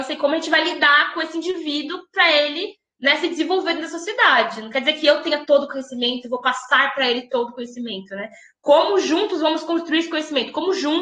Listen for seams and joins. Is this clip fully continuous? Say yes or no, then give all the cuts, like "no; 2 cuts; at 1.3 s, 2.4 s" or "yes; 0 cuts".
yes; 0 cuts